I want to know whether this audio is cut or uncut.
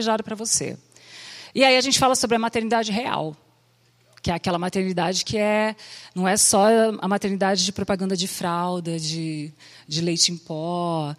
uncut